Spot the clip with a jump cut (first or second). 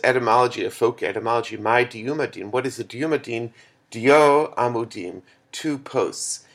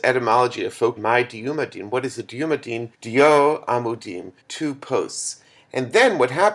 second